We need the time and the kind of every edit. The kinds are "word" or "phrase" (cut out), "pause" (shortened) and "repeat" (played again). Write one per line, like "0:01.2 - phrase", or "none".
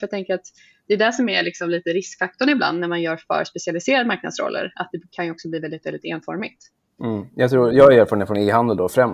none